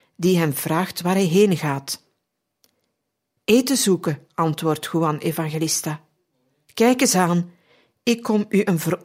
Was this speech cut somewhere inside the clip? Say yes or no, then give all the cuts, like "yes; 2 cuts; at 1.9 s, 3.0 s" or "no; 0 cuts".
no; 0 cuts